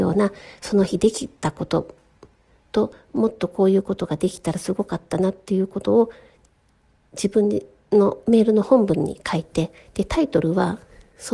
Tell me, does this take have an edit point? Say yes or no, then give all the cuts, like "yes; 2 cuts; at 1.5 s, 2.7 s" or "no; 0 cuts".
no; 0 cuts